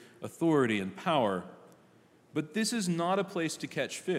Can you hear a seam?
no; 0 cuts

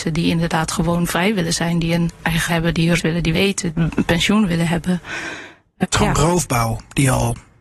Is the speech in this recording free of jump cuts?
no; 5 cuts; at 2.5 s, 3.0 s, 3.3 s, 3.7 s, 5.8 s

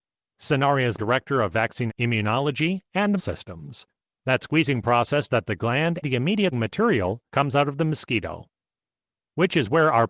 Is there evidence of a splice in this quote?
yes; 8 cuts; at 1.0 s, 1.9 s, 3.2 s, 4.1 s, 5.3 s, 6.0 s, 6.5 s, 7.3 s

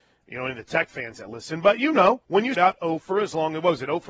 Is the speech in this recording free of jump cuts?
no; 2 cuts; at 2.2 s, 2.5 s

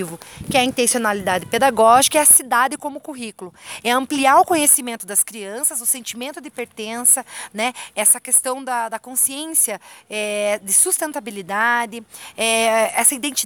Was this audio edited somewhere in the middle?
no; 0 cuts

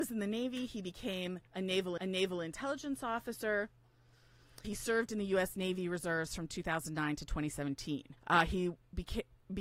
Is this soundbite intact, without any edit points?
no; 4 cuts; at 1.5 s, 2.0 s, 4.6 s, 8.2 s

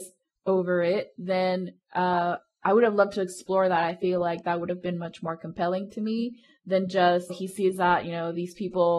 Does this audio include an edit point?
yes; 1 cut; at 7.3 s

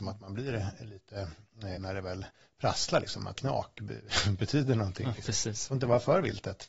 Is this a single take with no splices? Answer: no; 2 cuts; at 1.8 s, 3.4 s

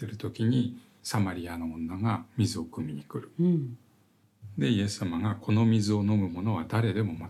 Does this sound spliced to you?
no; 0 cuts

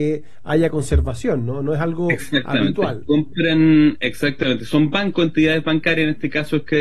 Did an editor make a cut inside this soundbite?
no; 0 cuts

